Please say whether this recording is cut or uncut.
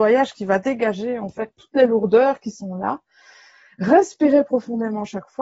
uncut